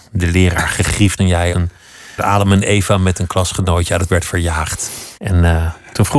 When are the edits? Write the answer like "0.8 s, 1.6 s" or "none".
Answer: 1.2 s, 1.5 s, 2.2 s, 4.1 s, 5.2 s